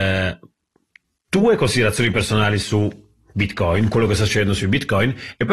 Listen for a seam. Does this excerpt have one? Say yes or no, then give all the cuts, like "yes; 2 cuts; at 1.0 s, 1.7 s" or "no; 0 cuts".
no; 0 cuts